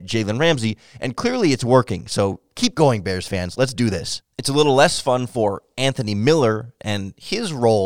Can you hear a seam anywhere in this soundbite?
yes; 1 cut; at 4.3 s

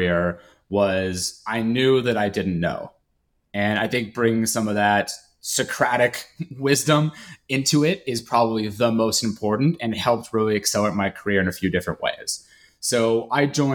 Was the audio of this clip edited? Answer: no; 0 cuts

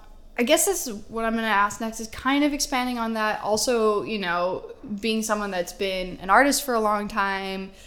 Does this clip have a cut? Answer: no; 0 cuts

